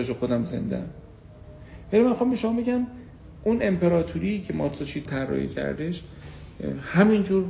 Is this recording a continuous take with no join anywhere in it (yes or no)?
no